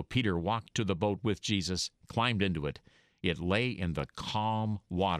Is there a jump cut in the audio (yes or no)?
no